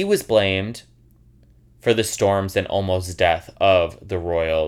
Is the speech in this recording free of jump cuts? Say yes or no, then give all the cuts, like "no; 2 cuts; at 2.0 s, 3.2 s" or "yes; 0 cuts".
yes; 0 cuts